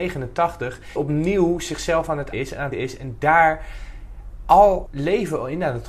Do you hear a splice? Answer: yes; 4 cuts; at 1.0 s, 2.3 s, 2.7 s, 4.9 s

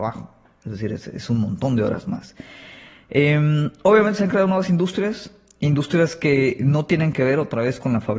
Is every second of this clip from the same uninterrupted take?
yes; 0 cuts

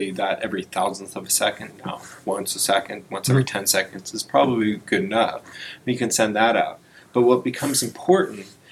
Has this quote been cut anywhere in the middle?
no; 0 cuts

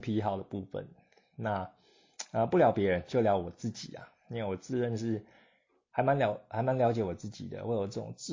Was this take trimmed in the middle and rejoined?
no; 0 cuts

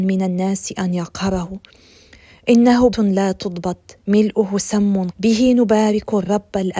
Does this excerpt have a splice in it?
yes; 2 cuts; at 2.9 s, 5.1 s

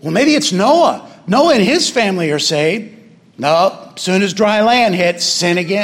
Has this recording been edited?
no; 0 cuts

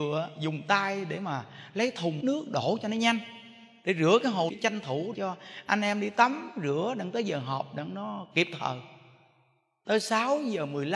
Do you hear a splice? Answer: yes; 3 cuts; at 2.2 s, 4.5 s, 5.1 s

